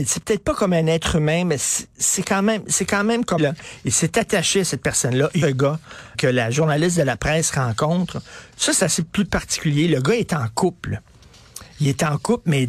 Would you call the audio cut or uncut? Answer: cut